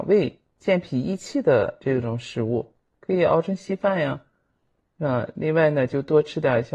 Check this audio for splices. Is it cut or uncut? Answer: uncut